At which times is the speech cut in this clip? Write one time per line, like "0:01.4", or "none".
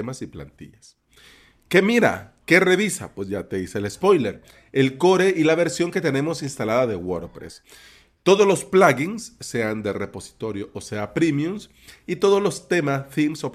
none